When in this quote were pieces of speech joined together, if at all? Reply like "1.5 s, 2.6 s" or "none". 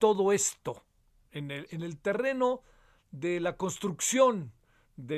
1.7 s